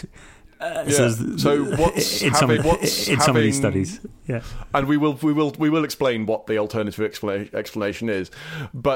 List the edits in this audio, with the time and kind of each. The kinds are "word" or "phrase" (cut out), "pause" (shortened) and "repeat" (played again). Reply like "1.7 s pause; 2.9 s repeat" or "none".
2.6 s repeat

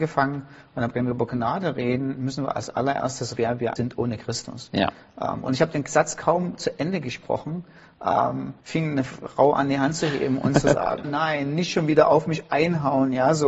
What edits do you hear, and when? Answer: 0.9 s word; 3.4 s word; 3.8 s word; 8.6 s pause; 11.0 s word

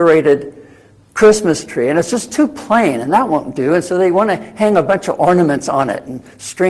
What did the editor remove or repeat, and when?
none

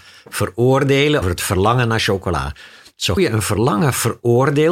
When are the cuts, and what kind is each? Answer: 1.2 s word; 3.2 s word

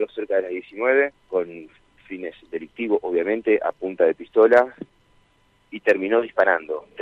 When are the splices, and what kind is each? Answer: 1.2 s pause

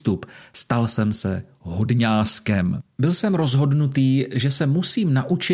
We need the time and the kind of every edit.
none

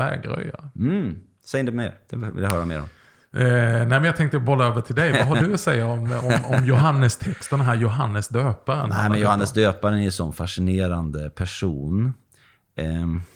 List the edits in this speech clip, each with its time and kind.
none

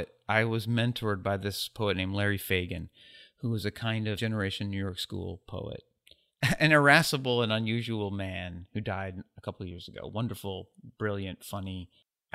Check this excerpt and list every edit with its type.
4.2 s word

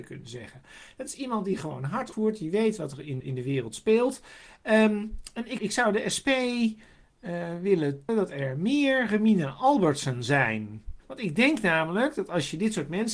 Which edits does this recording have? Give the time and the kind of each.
2.1 s word; 3.2 s word; 5.6 s word; 8.1 s word; 11.0 s pause

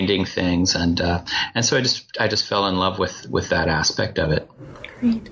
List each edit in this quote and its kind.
none

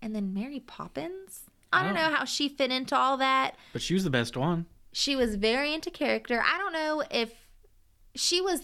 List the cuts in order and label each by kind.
1.6 s pause; 4.8 s pause

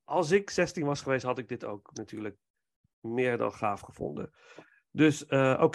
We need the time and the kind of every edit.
none

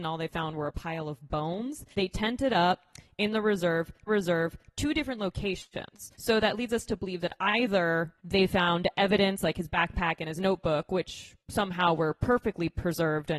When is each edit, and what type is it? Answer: 1.9 s pause; 4.1 s repeat; 6.1 s pause; 8.2 s pause; 11.4 s pause

